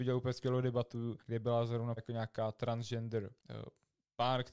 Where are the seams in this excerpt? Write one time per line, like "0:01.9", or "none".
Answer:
0:01.2
0:02.0
0:03.4